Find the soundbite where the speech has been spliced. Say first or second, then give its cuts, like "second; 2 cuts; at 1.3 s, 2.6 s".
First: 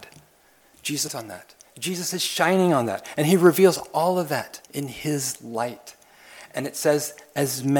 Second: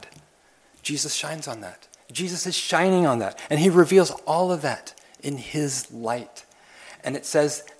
first; 2 cuts; at 1.1 s, 4.7 s